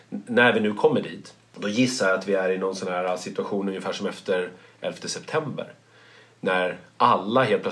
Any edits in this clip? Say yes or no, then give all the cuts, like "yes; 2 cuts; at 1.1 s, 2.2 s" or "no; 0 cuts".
no; 0 cuts